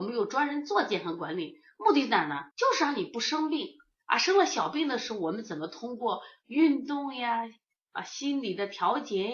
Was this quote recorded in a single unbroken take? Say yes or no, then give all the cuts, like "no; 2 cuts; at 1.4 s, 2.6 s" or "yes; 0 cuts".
no; 1 cut; at 2.5 s